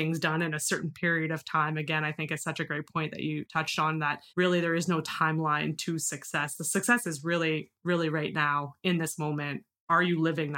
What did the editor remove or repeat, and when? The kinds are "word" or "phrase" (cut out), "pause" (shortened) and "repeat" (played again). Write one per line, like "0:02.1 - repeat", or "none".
0:04.3 - pause